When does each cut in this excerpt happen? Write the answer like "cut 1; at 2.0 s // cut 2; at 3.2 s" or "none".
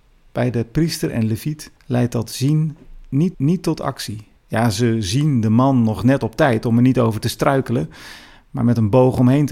cut 1; at 1.8 s // cut 2; at 3.3 s // cut 3; at 4.4 s